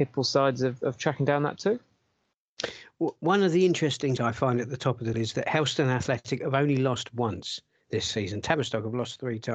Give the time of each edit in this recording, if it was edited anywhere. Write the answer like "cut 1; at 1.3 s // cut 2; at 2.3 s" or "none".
cut 1; at 1.6 s // cut 2; at 4.2 s // cut 3; at 5.1 s